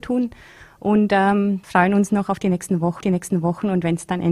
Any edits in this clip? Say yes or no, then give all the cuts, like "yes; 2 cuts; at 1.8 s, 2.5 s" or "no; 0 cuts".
yes; 2 cuts; at 1.6 s, 3.0 s